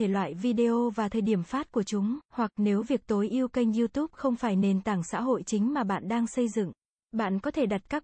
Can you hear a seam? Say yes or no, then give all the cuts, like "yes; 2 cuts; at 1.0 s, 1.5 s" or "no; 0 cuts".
yes; 2 cuts; at 2.2 s, 7.0 s